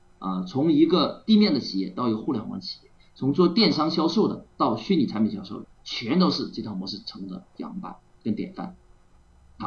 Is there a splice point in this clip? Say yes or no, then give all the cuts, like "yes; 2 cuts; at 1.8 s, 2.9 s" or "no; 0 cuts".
yes; 1 cut; at 5.7 s